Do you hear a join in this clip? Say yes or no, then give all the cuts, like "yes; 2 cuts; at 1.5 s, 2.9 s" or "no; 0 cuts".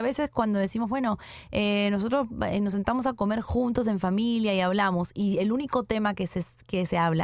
no; 0 cuts